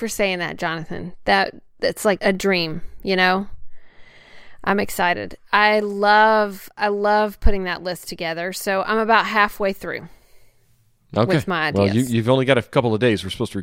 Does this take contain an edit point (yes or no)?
yes